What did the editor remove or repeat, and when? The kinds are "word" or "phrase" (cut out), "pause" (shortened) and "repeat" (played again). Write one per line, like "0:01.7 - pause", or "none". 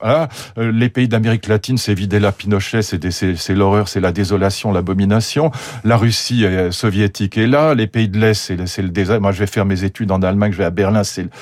none